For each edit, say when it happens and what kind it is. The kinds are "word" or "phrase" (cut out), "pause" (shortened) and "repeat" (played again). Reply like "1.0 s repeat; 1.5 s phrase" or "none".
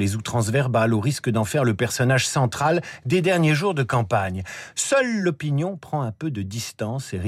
none

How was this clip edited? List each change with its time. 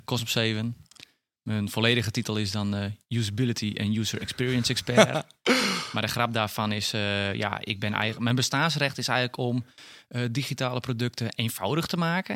3.0 s pause

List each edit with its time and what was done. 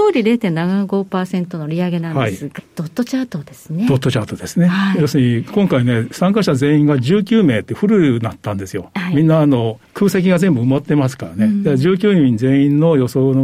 2.6 s phrase; 9.8 s pause

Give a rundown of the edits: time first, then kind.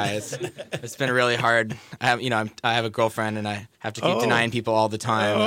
3.7 s pause

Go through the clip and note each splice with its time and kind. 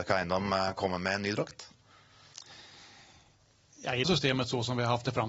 4.0 s phrase

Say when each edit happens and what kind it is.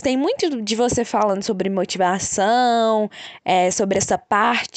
none

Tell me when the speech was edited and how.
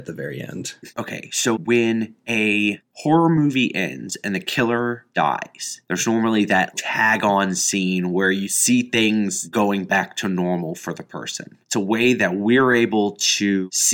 0.9 s pause; 1.6 s word; 11.6 s pause

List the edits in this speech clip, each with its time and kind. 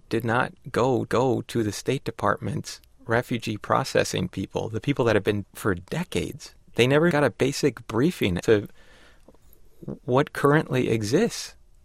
1.1 s repeat; 5.4 s phrase; 6.6 s pause; 7.1 s word; 8.4 s word

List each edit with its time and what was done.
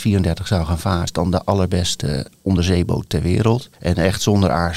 1.1 s word

